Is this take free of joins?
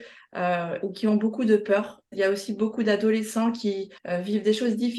no; 1 cut; at 4.0 s

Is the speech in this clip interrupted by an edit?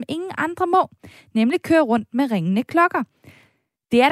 no; 0 cuts

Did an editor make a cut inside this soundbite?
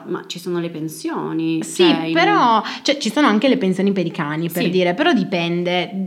no; 0 cuts

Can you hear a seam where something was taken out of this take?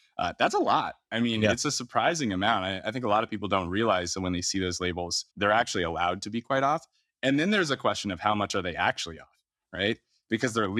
yes; 1 cut; at 5.3 s

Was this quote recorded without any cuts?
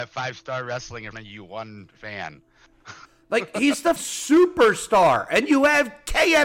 no; 3 cuts; at 1.1 s, 3.0 s, 4.0 s

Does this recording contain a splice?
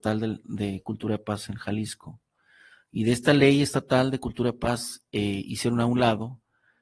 no; 0 cuts

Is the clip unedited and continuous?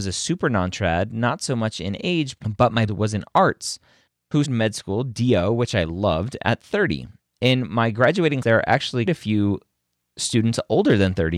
no; 4 cuts; at 2.9 s, 4.4 s, 8.4 s, 9.1 s

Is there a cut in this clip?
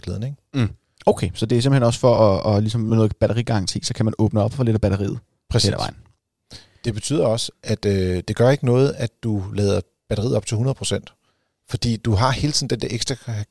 no; 0 cuts

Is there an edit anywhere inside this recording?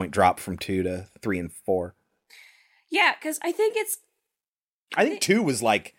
no; 0 cuts

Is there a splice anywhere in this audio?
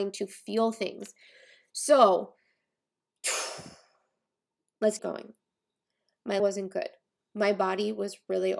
yes; 2 cuts; at 5.0 s, 6.4 s

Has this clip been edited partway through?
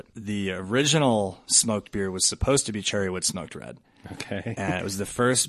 no; 0 cuts

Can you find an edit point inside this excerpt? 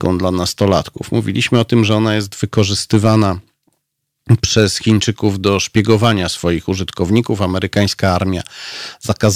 no; 0 cuts

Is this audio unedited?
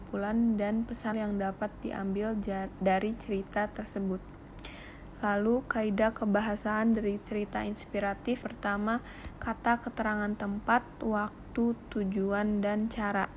no; 3 cuts; at 1.1 s, 7.2 s, 8.4 s

